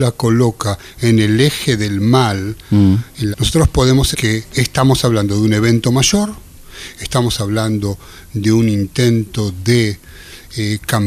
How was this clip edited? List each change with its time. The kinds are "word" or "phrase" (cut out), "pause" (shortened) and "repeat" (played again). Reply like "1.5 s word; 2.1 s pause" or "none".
3.3 s phrase; 4.1 s word